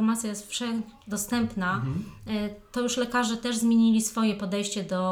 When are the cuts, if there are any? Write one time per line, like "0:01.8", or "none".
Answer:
0:01.0